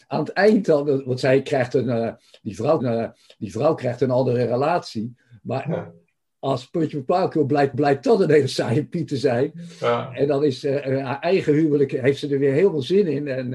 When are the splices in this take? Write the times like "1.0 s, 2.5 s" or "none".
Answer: 2.8 s, 7.7 s